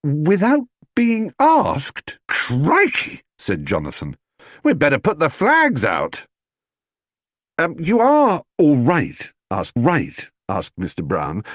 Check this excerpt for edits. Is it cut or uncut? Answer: cut